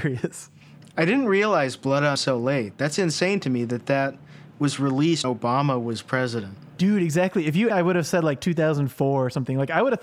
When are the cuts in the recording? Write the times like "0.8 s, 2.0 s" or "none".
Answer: 2.2 s, 4.5 s, 5.2 s, 7.7 s

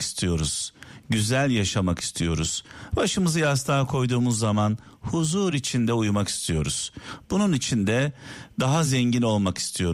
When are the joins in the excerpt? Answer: none

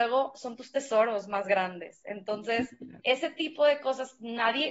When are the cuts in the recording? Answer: 3.0 s

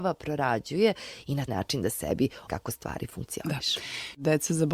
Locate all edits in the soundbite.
1.5 s, 2.5 s

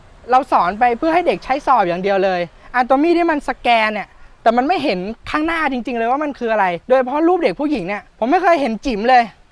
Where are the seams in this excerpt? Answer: 6.8 s

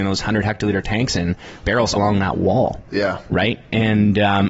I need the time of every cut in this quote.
1.6 s, 2.0 s

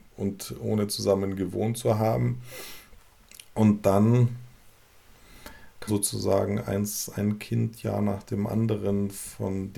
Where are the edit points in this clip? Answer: 5.9 s, 7.8 s

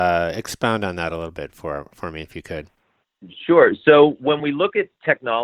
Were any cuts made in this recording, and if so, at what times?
none

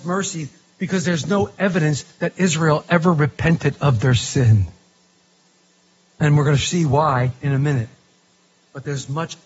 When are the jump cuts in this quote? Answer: none

